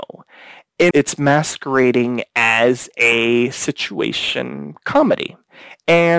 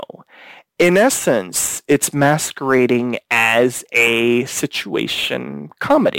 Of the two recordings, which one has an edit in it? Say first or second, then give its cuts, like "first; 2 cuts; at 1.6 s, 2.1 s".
first; 1 cut; at 0.9 s